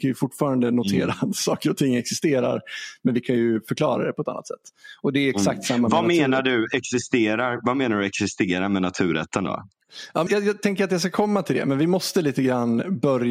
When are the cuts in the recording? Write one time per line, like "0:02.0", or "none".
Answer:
0:10.3